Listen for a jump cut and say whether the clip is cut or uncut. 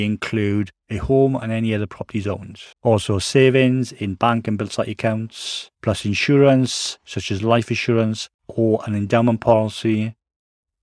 cut